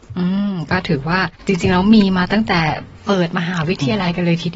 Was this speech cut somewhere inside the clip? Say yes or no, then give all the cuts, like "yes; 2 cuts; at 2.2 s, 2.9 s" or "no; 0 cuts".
yes; 1 cut; at 1.4 s